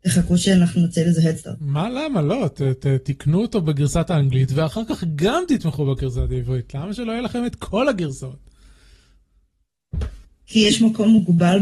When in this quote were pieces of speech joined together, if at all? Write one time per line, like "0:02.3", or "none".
0:10.2

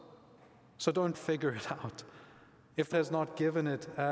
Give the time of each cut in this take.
0:01.1
0:02.9

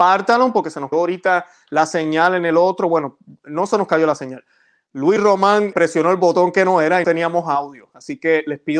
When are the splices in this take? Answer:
0:00.9
0:05.7
0:07.0

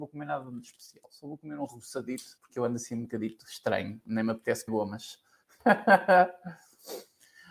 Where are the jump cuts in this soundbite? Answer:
0:02.4
0:04.7

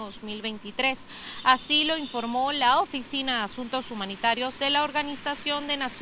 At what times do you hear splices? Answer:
none

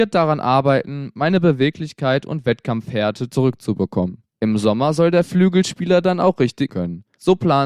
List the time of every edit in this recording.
0:06.7

